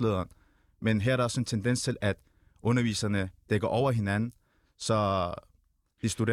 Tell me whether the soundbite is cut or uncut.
uncut